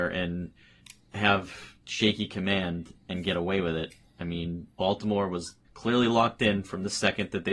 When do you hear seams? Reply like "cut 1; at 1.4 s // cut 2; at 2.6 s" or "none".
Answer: cut 1; at 1.8 s // cut 2; at 5.6 s